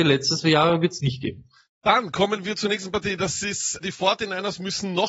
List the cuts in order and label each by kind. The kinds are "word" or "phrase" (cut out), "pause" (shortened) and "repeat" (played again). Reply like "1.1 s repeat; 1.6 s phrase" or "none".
3.8 s word